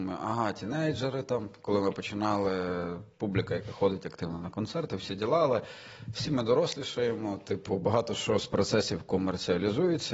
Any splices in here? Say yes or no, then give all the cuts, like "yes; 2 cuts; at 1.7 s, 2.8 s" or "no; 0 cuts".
no; 0 cuts